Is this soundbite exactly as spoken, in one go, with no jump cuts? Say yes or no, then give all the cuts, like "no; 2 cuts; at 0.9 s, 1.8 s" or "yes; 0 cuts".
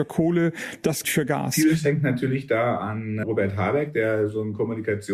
no; 1 cut; at 1.0 s